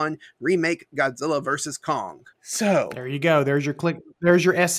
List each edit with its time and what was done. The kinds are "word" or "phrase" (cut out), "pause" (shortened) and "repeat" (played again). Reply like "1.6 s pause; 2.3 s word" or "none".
2.3 s pause